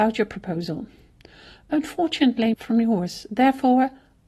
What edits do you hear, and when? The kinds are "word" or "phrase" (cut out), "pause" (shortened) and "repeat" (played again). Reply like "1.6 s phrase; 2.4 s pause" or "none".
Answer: 2.5 s phrase